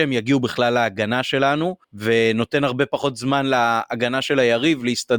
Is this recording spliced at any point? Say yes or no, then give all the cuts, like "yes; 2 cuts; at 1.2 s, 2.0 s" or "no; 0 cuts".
yes; 1 cut; at 1.8 s